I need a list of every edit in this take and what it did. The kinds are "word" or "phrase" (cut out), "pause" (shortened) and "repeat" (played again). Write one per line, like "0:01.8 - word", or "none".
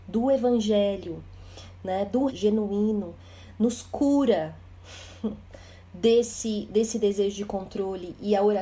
0:02.3 - phrase

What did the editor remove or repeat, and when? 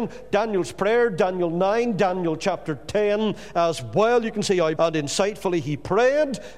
0:04.8 - word

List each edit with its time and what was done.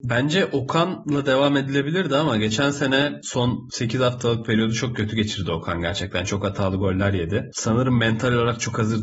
none

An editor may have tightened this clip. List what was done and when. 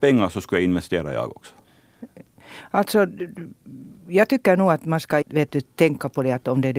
0:05.2 - word

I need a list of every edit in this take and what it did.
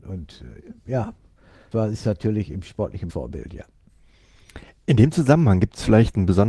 0:01.7 - word
0:03.1 - phrase
0:04.7 - pause

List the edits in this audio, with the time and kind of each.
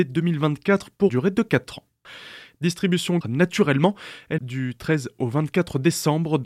0:01.1 - word
0:03.2 - phrase
0:04.4 - phrase

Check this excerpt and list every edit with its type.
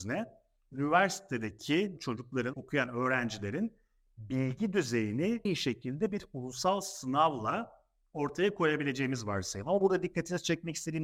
0:02.0 - word
0:02.5 - word
0:05.5 - word

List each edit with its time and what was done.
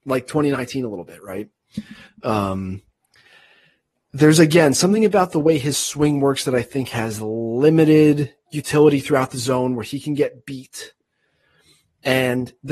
none

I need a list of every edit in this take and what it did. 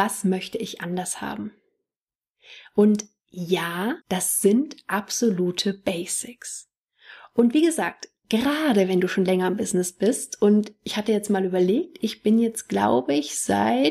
0:04.0 - pause

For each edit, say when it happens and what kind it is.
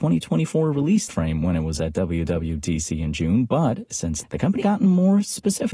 0:01.1 - word
0:01.8 - word
0:04.2 - word
0:04.6 - word

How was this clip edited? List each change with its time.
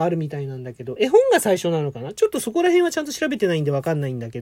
none

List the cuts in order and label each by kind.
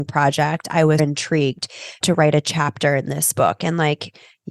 0:01.0 - word
0:02.0 - phrase

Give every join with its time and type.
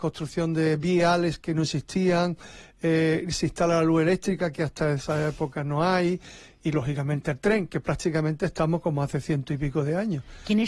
none

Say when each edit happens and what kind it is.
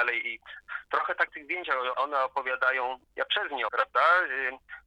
0:01.3 - word
0:01.9 - word
0:03.7 - word

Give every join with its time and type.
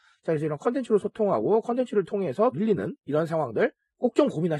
0:02.5 - word
0:03.0 - pause

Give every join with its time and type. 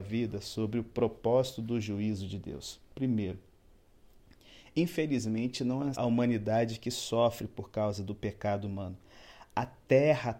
0:05.9 - word

